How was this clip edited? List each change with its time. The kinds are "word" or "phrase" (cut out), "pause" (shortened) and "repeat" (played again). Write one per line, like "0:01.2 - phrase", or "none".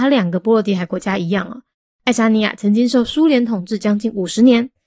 none